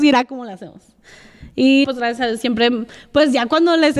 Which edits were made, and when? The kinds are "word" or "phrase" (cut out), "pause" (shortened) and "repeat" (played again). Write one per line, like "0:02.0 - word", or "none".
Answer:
0:01.8 - word